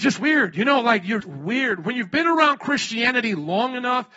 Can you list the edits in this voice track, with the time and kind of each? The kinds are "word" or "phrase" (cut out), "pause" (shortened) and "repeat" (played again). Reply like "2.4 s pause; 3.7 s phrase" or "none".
1.2 s word